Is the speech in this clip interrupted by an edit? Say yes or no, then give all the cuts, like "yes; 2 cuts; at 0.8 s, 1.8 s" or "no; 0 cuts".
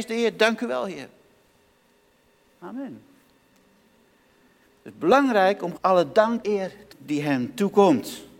yes; 3 cuts; at 5.8 s, 6.4 s, 6.9 s